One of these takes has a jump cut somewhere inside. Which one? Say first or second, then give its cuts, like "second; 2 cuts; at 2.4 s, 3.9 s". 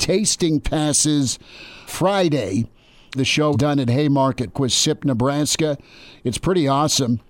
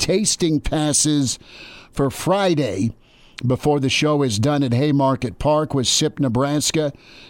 first; 4 cuts; at 1.9 s, 3.1 s, 3.5 s, 4.5 s